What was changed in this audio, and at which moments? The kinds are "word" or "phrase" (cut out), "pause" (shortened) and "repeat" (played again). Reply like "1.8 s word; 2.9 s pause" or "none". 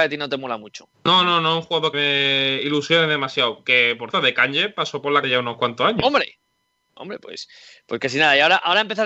0.9 s pause; 1.9 s word; 4.1 s word; 5.2 s phrase